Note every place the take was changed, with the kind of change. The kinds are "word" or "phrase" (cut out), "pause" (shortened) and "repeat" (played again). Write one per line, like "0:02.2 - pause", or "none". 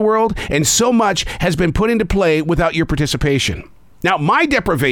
none